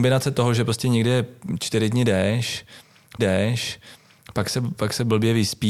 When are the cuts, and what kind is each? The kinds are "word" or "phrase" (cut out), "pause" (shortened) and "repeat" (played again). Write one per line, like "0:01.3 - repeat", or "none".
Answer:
0:03.2 - repeat